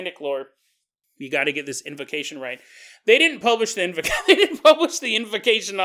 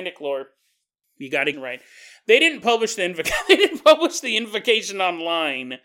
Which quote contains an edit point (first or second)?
second